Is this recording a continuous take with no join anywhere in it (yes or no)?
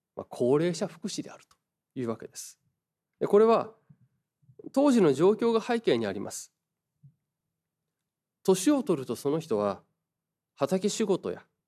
no